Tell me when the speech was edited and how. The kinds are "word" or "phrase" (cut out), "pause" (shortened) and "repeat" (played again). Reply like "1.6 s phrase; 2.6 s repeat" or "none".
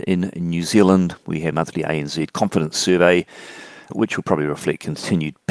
1.5 s word; 2.3 s word; 3.9 s word